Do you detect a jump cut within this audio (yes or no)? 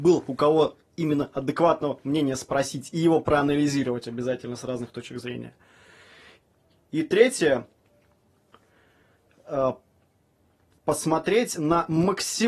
no